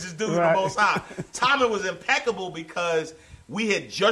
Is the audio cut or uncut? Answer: uncut